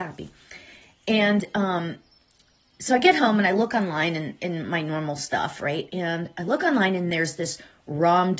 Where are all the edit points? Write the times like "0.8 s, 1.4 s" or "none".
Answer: none